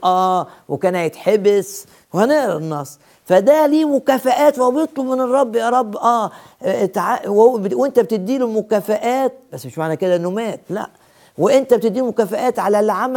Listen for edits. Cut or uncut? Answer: uncut